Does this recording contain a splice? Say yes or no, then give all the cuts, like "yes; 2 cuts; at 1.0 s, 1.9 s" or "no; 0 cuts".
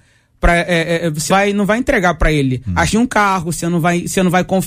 yes; 2 cuts; at 1.3 s, 2.9 s